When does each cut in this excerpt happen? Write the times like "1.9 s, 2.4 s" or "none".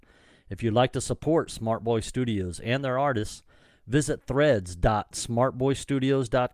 none